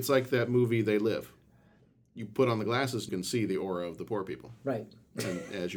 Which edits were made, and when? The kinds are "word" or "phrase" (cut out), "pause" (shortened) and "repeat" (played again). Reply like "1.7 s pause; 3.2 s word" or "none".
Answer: 3.1 s word